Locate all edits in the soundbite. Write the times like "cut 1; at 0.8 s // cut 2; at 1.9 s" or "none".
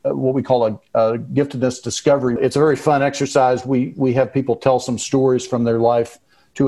cut 1; at 2.4 s